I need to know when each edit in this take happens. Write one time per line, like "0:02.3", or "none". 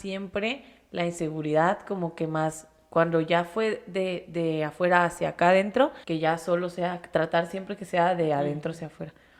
0:06.0